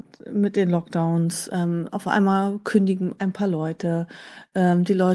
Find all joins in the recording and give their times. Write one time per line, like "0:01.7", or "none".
none